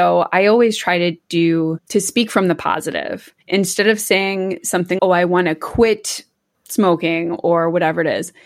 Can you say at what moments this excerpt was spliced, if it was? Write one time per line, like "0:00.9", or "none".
0:03.4
0:05.0
0:06.5